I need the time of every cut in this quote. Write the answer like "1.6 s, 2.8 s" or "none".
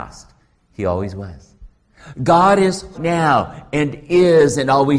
2.9 s